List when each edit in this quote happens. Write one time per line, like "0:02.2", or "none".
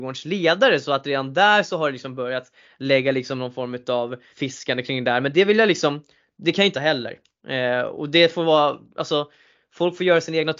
0:04.3
0:06.7